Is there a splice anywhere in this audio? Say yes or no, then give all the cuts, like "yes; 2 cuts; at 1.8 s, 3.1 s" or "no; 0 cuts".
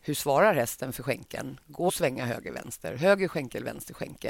yes; 1 cut; at 1.9 s